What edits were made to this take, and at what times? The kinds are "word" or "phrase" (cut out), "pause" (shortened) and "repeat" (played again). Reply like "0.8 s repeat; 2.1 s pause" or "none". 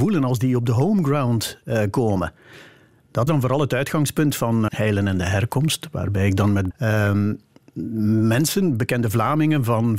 3.3 s word; 4.7 s word; 6.7 s word